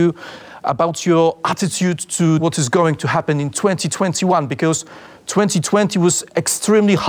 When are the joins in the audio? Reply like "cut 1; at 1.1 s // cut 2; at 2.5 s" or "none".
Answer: none